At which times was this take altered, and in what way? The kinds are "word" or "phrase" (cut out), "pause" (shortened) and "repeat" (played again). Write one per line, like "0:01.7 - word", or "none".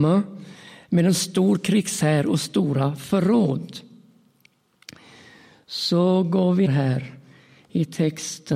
0:06.7 - word